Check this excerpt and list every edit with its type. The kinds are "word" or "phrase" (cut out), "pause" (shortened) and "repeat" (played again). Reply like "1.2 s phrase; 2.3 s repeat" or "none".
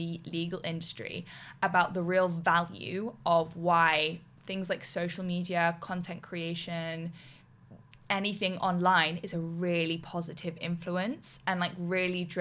none